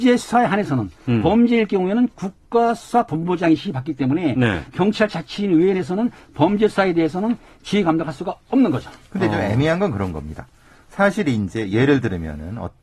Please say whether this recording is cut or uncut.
uncut